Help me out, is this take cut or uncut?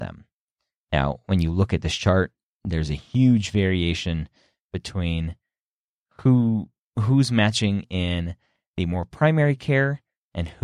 uncut